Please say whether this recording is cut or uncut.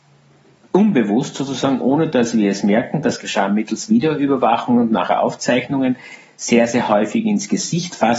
uncut